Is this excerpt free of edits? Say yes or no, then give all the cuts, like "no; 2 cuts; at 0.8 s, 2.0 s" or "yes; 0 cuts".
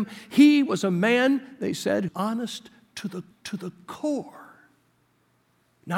no; 2 cuts; at 2.1 s, 3.3 s